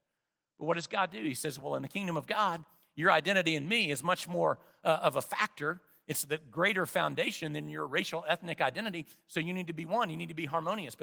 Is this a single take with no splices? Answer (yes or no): yes